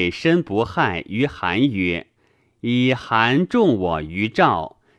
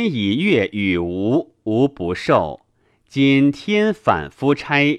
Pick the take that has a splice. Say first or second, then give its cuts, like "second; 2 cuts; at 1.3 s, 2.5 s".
first; 1 cut; at 2.2 s